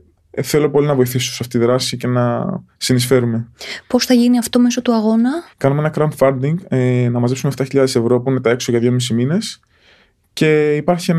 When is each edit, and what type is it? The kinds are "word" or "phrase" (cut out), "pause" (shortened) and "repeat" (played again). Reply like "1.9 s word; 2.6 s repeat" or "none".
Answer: 5.5 s pause